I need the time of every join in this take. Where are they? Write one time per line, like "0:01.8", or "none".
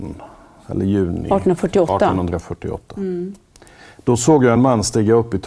none